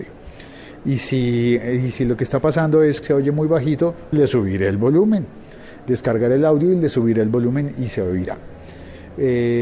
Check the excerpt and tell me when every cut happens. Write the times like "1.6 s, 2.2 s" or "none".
3.0 s, 4.1 s